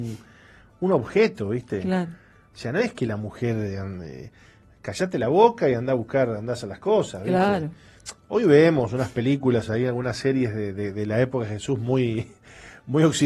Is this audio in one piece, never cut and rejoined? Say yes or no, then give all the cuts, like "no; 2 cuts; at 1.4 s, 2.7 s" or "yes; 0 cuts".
yes; 0 cuts